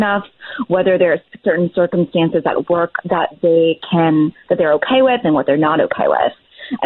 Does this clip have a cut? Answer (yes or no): no